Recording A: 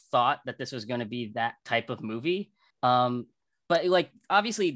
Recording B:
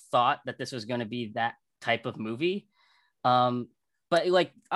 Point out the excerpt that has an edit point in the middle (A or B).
A